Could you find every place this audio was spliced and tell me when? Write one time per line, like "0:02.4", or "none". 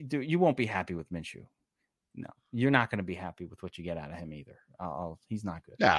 none